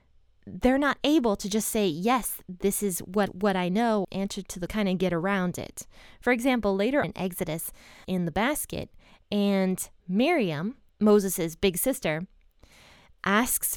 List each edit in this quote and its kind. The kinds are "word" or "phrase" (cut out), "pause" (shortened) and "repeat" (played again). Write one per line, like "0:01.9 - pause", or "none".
0:03.3 - repeat
0:04.0 - phrase
0:04.7 - phrase
0:07.0 - word
0:08.0 - phrase